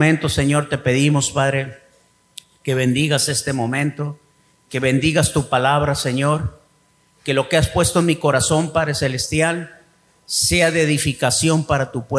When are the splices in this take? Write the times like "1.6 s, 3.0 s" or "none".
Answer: none